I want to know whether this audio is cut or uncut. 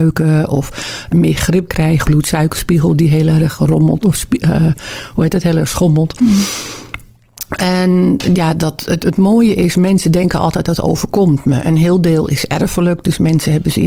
cut